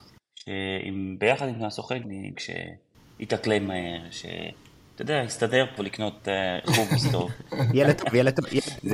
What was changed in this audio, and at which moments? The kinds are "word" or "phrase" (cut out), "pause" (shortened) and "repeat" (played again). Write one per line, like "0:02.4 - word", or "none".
0:02.0 - word
0:02.4 - word
0:05.8 - phrase